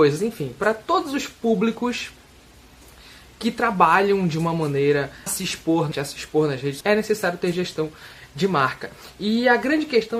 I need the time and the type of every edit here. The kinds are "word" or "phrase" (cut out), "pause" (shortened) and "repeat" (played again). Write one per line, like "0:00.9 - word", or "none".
0:05.3 - word
0:05.9 - word
0:06.8 - word